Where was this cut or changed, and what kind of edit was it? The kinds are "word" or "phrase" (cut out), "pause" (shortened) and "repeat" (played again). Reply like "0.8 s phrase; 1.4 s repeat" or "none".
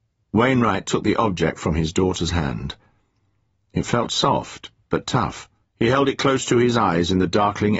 2.3 s word; 5.6 s pause